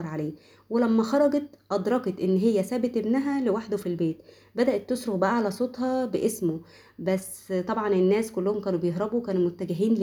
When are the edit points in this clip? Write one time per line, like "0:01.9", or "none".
none